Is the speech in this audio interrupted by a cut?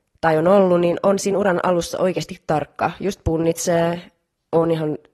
no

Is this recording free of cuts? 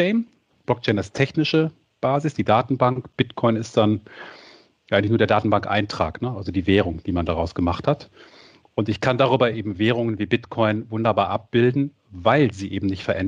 yes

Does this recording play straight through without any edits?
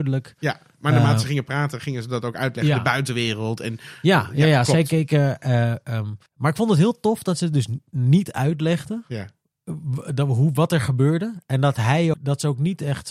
no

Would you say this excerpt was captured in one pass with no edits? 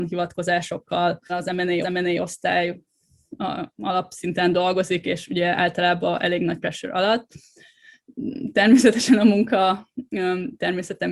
no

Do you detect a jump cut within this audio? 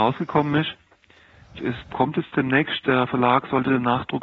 yes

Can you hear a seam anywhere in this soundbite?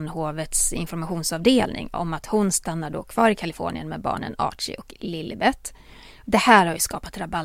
no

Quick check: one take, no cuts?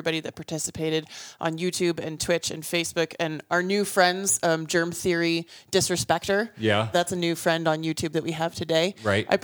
no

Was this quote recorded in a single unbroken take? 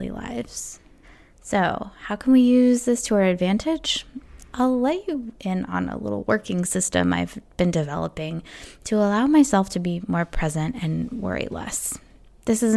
no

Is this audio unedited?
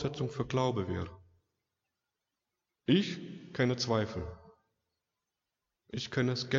yes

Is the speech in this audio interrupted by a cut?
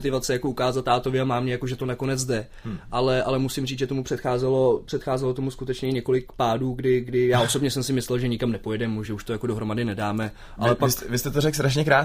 yes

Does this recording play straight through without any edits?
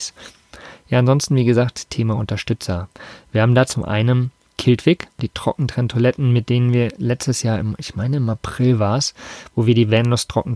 yes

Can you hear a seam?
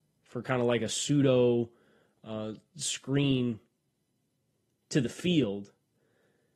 no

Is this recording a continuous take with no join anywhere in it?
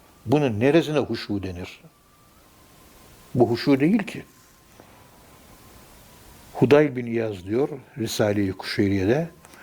yes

